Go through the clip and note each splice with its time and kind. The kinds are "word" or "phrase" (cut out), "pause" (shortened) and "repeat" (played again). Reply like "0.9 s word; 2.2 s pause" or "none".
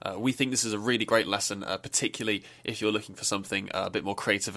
none